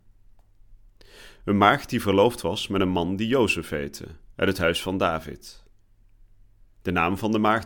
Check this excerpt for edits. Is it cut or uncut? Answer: cut